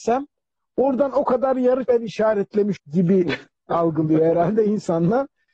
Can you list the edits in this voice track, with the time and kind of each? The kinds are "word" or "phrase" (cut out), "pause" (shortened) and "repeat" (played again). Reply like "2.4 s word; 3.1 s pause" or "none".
1.9 s word; 2.8 s word